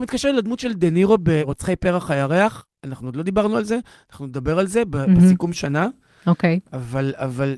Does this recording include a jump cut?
no; 0 cuts

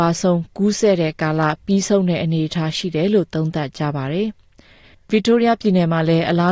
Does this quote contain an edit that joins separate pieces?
no; 0 cuts

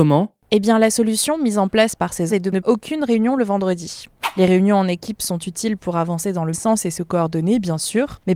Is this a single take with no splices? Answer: no; 3 cuts; at 2.3 s, 2.6 s, 6.5 s

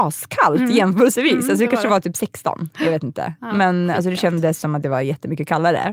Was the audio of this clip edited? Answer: no; 0 cuts

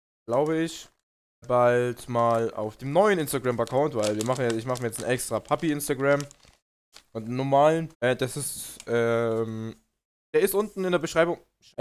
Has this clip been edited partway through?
yes; 3 cuts; at 1.4 s, 2.8 s, 7.9 s

